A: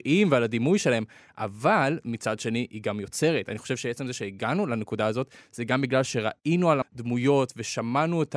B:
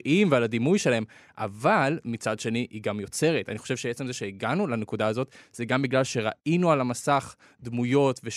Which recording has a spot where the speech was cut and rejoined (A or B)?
A